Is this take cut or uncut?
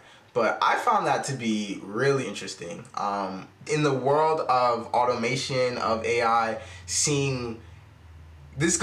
cut